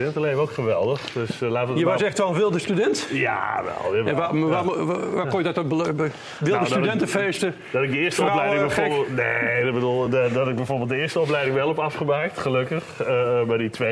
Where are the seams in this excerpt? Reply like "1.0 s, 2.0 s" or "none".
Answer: none